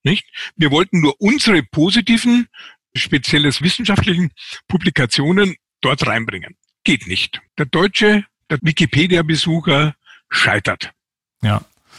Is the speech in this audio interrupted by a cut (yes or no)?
yes